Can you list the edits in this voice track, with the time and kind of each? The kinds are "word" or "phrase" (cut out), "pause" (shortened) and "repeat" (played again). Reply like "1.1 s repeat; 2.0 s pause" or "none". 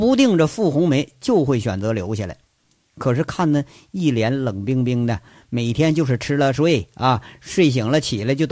none